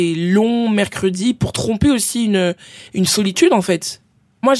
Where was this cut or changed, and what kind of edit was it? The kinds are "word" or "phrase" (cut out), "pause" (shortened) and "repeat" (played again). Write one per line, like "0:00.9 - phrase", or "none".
0:02.9 - pause